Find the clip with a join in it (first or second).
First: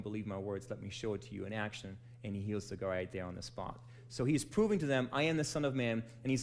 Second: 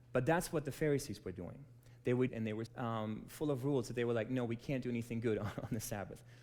second